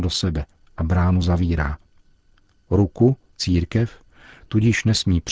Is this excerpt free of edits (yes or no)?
no